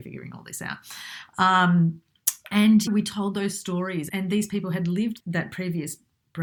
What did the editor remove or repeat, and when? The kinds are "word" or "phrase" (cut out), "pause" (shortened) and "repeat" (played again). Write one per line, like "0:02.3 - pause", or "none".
0:02.9 - phrase
0:04.1 - word
0:05.2 - word